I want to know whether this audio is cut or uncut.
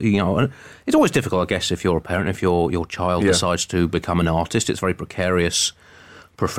uncut